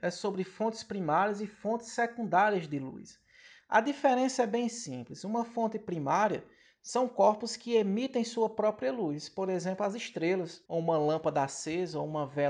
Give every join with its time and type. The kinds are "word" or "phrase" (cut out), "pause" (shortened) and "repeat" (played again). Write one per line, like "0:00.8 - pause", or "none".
0:10.7 - pause